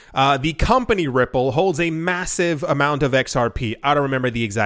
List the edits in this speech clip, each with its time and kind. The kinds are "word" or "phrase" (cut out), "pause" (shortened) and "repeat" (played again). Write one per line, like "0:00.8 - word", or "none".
none